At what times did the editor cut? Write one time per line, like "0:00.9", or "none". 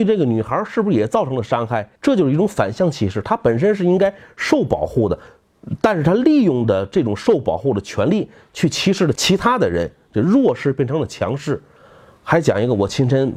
0:02.0